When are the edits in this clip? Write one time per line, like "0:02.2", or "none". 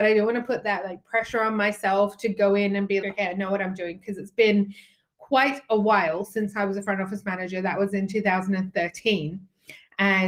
0:03.0